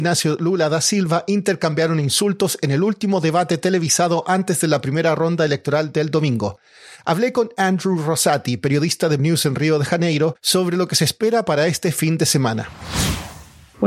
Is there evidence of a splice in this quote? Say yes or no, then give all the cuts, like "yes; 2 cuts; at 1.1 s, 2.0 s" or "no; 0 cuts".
yes; 2 cuts; at 9.2 s, 10.4 s